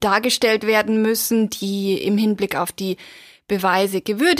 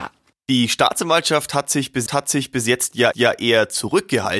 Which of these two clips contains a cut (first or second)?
second